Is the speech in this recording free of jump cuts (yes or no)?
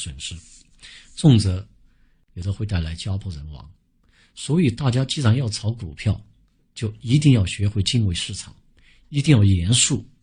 yes